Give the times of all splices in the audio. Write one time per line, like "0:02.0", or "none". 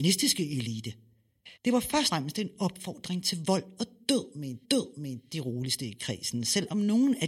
0:01.6
0:02.1
0:04.6